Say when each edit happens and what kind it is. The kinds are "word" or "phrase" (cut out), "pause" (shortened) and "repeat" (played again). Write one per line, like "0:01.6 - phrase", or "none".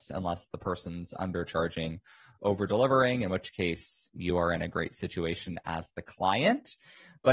none